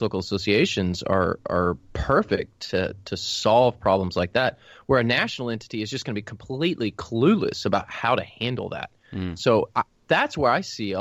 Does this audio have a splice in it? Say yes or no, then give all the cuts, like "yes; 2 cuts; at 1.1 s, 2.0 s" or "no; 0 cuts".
no; 0 cuts